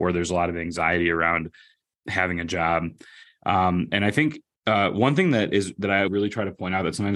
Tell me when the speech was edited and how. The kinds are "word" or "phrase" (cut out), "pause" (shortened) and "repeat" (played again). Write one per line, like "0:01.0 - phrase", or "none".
0:06.1 - word